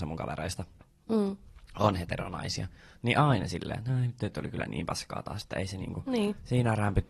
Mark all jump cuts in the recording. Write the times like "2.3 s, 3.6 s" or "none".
none